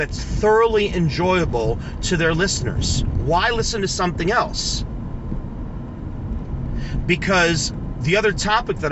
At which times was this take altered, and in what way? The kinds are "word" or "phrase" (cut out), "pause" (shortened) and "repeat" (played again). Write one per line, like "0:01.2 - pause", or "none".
none